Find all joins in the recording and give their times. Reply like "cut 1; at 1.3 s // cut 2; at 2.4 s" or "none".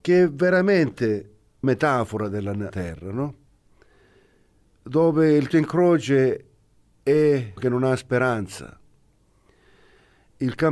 cut 1; at 1.6 s // cut 2; at 2.7 s // cut 3; at 5.5 s // cut 4; at 7.6 s